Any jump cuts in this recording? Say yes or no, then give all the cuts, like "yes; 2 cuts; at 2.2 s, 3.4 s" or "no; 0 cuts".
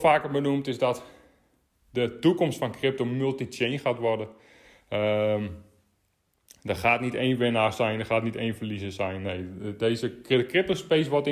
no; 0 cuts